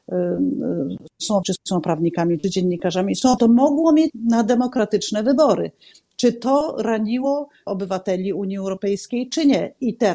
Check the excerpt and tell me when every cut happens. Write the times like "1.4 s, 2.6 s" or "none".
1.4 s, 3.4 s, 4.1 s, 7.7 s